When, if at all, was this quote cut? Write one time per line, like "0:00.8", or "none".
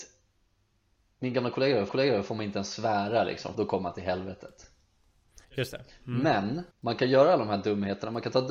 0:01.9
0:03.5
0:05.4
0:06.7